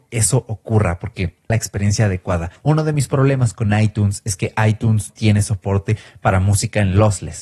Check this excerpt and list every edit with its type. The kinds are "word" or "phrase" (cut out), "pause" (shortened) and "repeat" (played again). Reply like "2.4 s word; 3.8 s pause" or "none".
1.5 s phrase; 2.6 s pause; 5.1 s word